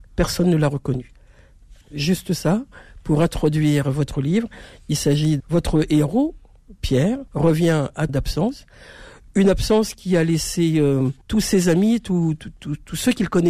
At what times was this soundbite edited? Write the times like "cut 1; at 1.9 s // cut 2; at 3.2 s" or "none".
cut 1; at 1.8 s // cut 2; at 5.4 s // cut 3; at 7.3 s // cut 4; at 8.1 s // cut 5; at 11.2 s